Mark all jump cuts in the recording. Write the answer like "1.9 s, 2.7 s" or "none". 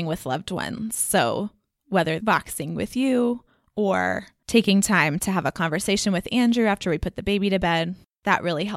2.2 s

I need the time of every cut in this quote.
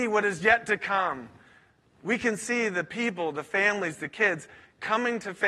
none

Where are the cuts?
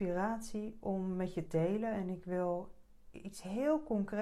1.5 s

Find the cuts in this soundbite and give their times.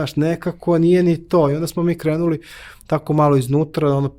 none

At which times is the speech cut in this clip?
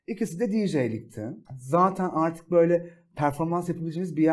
1.4 s

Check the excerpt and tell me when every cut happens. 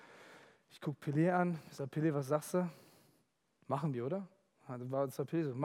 none

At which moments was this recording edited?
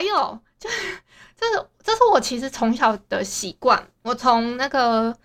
4.0 s

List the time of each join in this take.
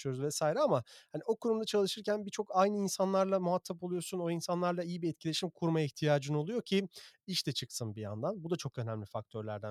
none

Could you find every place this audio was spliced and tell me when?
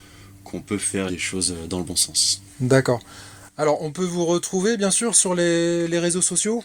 1.1 s

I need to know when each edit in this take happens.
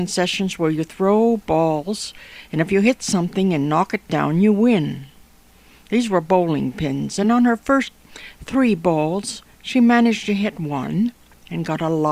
none

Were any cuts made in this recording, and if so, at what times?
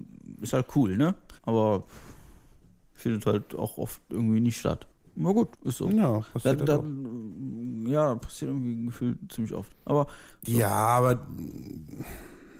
1.4 s, 4.9 s, 5.5 s

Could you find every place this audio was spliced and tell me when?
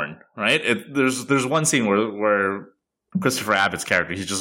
none

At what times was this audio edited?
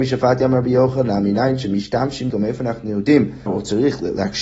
2.3 s, 3.5 s

